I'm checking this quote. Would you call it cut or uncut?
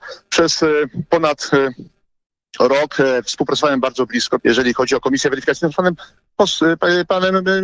cut